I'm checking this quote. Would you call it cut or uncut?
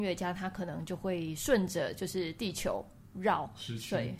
uncut